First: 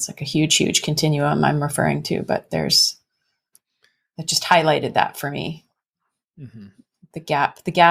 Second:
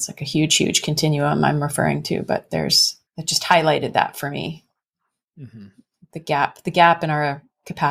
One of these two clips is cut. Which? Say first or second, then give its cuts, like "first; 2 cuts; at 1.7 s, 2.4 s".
second; 1 cut; at 3.1 s